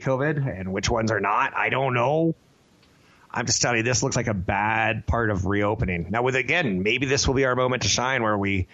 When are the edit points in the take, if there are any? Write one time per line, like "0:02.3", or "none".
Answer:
none